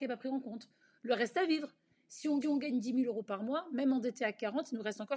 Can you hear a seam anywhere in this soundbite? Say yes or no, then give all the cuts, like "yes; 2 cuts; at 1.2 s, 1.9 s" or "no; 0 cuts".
yes; 1 cut; at 2.4 s